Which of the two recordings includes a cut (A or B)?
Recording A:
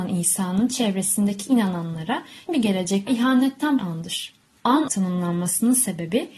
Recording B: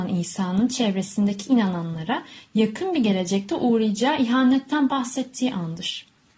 A